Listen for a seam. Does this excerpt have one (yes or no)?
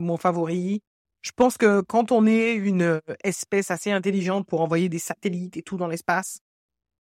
no